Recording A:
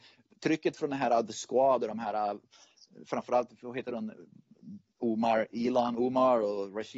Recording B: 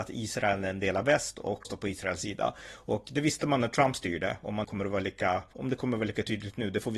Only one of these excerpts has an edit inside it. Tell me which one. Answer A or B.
B